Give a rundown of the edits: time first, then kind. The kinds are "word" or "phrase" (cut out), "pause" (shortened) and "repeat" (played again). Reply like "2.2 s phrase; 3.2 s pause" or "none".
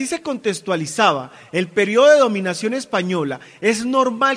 none